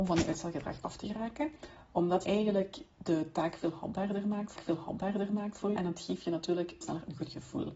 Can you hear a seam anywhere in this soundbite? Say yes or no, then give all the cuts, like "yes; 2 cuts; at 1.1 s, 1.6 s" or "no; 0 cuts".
yes; 4 cuts; at 2.2 s, 4.6 s, 5.8 s, 6.8 s